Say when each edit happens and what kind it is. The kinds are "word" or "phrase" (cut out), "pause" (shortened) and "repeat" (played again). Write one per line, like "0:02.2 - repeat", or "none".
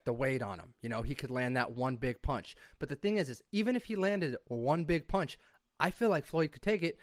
none